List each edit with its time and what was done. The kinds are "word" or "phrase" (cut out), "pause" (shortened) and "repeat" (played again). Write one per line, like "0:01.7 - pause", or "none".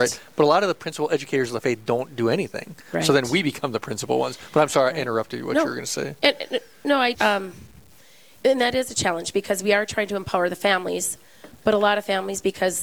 0:07.1 - word